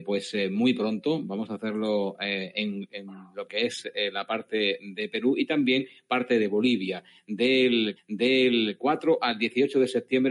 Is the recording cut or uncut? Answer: cut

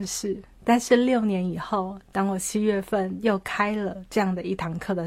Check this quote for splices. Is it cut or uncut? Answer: uncut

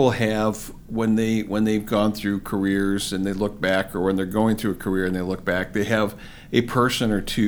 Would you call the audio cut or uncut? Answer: uncut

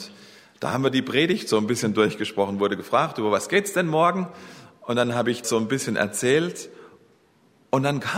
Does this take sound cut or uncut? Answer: cut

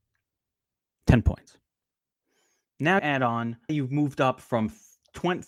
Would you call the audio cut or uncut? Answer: cut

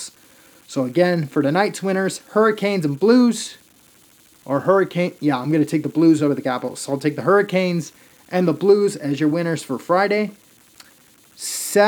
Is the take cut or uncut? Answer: uncut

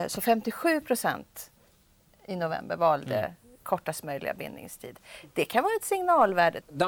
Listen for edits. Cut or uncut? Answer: uncut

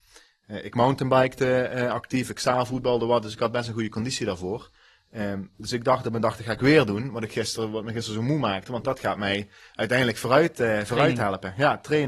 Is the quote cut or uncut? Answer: uncut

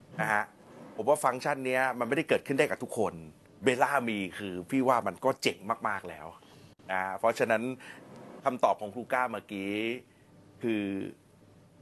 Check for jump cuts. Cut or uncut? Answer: cut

